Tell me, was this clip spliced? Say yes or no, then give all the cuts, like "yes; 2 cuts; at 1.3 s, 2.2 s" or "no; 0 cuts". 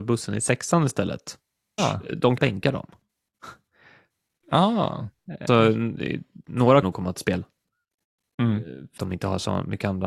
yes; 5 cuts; at 1.8 s, 2.4 s, 5.5 s, 6.8 s, 9.0 s